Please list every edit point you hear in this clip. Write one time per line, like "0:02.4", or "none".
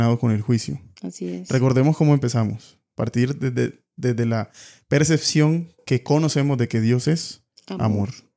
none